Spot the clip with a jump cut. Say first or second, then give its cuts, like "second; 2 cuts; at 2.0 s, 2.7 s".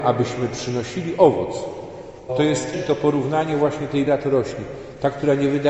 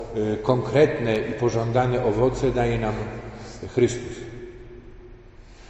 first; 3 cuts; at 2.3 s, 2.7 s, 4.1 s